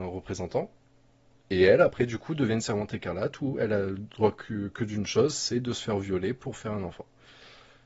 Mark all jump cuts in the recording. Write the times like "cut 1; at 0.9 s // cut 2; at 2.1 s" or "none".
none